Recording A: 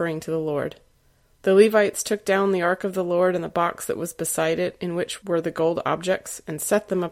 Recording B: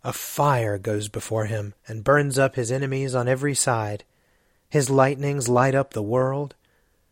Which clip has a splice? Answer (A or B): B